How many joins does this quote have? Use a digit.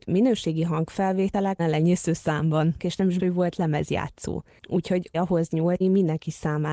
5